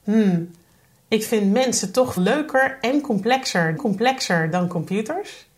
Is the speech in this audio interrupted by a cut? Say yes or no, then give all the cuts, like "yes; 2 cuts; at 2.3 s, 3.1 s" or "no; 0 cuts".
yes; 2 cuts; at 2.2 s, 3.8 s